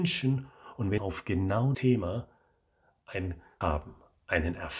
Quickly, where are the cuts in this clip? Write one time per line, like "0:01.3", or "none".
0:01.0
0:01.7
0:03.6